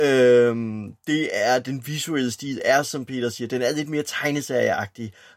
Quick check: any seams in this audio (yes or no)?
no